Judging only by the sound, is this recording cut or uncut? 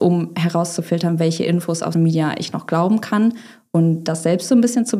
cut